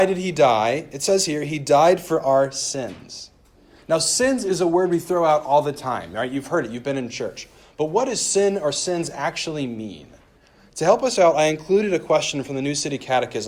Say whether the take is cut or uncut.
uncut